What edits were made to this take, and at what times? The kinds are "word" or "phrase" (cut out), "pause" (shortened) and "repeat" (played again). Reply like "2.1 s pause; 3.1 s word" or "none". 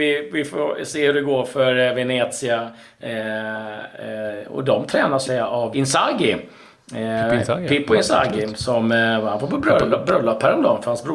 5.2 s phrase; 5.7 s word